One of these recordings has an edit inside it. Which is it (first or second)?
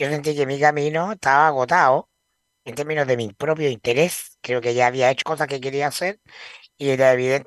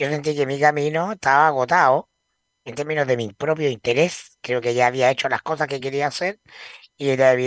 first